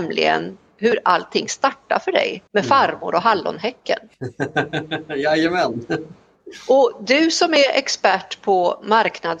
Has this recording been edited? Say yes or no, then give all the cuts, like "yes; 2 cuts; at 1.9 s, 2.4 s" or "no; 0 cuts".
yes; 1 cut; at 2.5 s